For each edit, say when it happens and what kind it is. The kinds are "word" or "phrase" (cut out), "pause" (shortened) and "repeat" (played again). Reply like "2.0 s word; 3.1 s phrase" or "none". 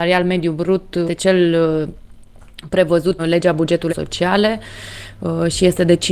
1.1 s word; 3.2 s word; 3.9 s word